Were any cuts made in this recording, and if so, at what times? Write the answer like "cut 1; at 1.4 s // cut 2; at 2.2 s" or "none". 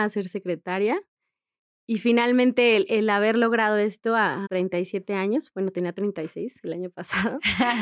cut 1; at 4.5 s